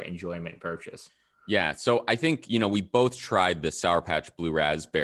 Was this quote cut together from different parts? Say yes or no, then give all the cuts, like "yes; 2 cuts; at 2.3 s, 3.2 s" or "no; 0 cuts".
no; 0 cuts